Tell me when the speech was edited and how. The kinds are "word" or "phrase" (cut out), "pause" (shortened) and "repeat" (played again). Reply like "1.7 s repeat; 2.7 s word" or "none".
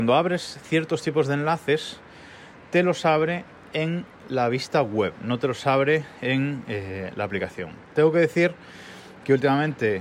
none